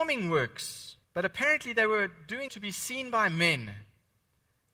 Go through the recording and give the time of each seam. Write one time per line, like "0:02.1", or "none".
0:01.0
0:02.5